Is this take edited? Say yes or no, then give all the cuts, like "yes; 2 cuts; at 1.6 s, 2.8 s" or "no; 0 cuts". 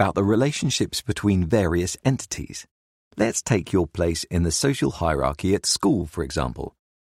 no; 0 cuts